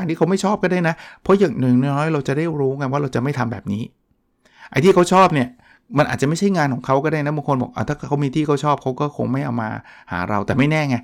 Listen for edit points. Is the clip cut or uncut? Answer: uncut